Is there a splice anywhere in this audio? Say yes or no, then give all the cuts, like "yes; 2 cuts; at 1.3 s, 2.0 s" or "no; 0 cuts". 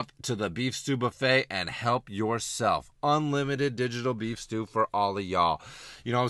no; 0 cuts